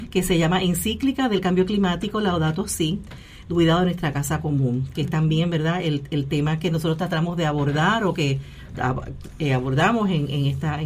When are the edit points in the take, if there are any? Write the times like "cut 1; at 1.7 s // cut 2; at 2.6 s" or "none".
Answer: none